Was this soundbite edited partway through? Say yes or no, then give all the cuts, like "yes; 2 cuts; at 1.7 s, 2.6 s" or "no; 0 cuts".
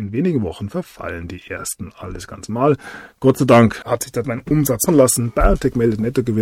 yes; 3 cuts; at 3.8 s, 4.2 s, 4.9 s